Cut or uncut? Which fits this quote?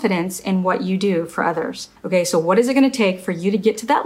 cut